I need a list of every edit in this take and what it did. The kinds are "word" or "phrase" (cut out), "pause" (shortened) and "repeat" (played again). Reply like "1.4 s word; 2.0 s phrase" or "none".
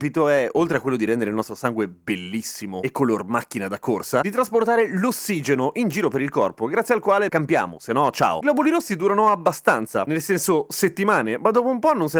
7.3 s word